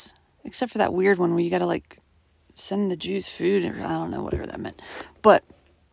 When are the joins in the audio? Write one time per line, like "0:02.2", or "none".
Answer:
none